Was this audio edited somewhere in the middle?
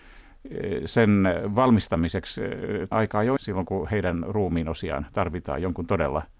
yes; 2 cuts; at 2.9 s, 3.4 s

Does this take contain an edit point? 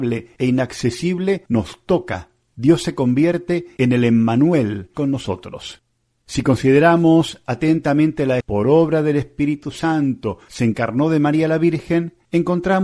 yes; 2 cuts; at 4.9 s, 8.4 s

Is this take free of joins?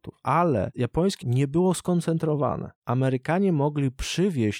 no; 1 cut; at 1.2 s

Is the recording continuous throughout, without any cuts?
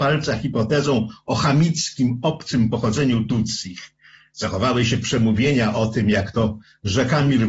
yes; 0 cuts

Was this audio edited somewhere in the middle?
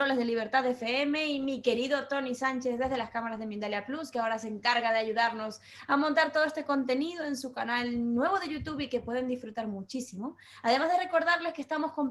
no; 0 cuts

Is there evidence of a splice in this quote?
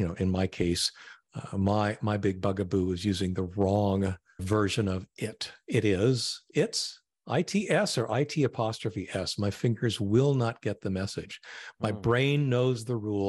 yes; 1 cut; at 4.4 s

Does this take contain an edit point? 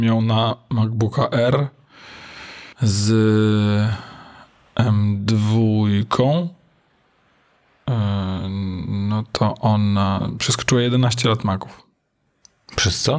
yes; 1 cut; at 2.7 s

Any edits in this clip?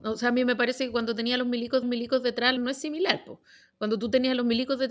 yes; 2 cuts; at 1.8 s, 2.6 s

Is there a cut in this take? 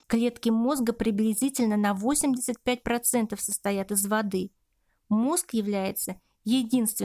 no; 0 cuts

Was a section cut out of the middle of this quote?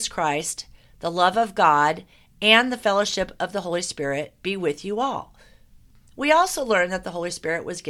no; 0 cuts

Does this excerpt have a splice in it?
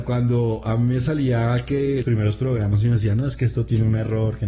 yes; 1 cut; at 2.0 s

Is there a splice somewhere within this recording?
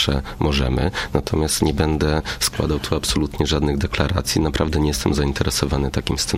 no; 0 cuts

